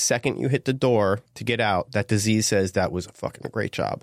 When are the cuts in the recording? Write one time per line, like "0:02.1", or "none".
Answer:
0:01.3